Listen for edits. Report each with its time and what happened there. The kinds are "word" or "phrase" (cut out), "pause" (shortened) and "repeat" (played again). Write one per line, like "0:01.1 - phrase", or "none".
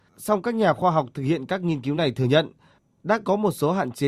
none